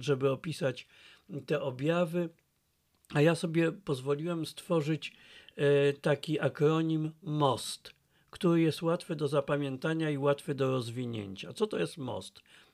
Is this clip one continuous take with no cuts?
yes; 0 cuts

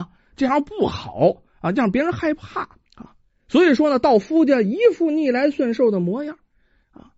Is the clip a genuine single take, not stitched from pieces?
no; 1 cut; at 2.9 s

